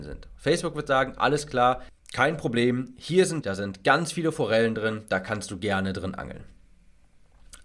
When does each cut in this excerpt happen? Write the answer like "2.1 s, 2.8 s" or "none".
3.4 s